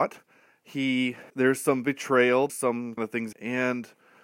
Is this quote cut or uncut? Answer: cut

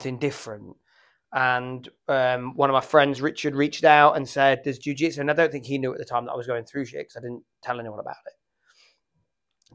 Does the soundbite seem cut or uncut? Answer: uncut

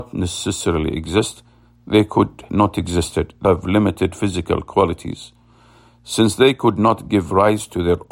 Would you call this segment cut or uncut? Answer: cut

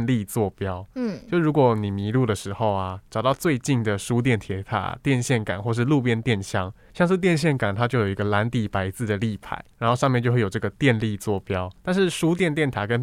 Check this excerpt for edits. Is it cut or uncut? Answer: cut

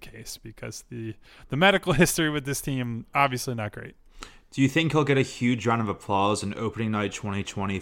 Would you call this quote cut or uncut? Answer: uncut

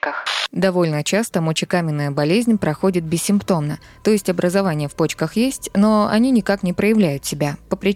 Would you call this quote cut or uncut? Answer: uncut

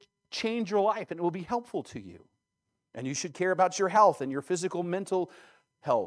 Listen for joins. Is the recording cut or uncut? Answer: uncut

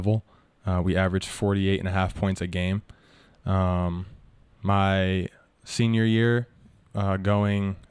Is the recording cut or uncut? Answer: uncut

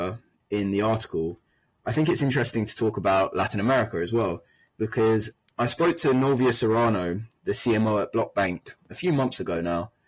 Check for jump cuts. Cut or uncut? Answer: uncut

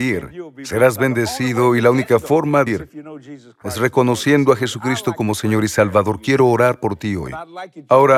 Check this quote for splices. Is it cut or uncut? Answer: cut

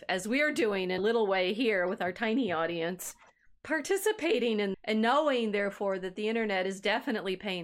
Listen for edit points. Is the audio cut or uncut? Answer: cut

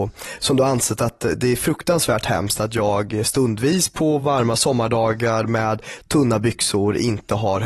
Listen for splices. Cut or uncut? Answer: uncut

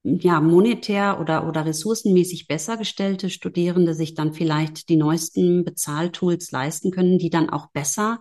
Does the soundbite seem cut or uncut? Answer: uncut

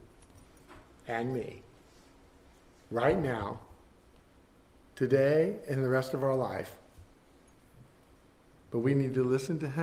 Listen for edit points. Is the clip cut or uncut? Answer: uncut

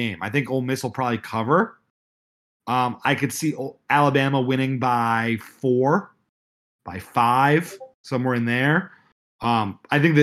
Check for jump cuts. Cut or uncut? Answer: uncut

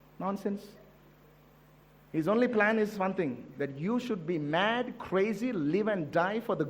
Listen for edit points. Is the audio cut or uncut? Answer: uncut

